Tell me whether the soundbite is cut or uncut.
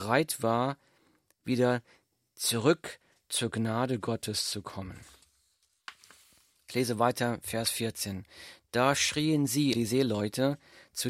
cut